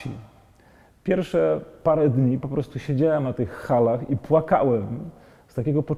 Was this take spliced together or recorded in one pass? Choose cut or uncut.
uncut